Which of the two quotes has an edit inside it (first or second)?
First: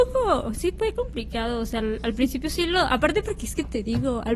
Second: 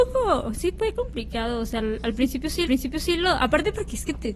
second